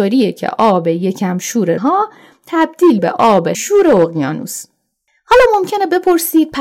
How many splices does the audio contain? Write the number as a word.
three